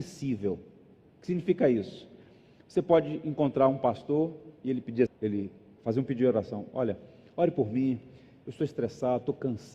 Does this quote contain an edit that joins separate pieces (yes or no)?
yes